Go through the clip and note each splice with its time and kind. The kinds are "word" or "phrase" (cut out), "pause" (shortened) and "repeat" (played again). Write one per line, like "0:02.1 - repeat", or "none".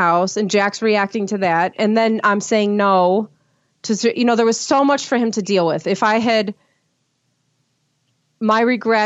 none